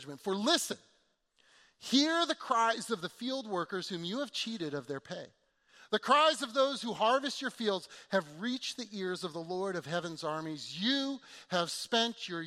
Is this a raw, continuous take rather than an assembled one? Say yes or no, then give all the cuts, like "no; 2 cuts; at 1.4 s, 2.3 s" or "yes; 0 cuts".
yes; 0 cuts